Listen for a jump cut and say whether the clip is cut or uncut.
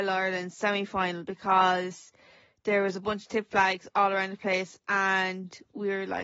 uncut